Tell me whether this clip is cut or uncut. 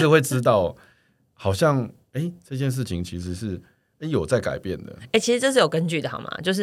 uncut